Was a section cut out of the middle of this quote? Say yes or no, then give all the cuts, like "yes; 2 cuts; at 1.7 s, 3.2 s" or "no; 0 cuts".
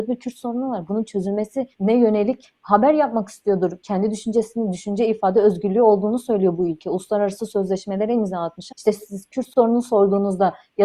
yes; 2 cuts; at 1.7 s, 8.7 s